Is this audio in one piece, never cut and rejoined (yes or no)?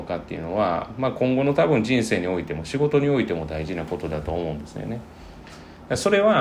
yes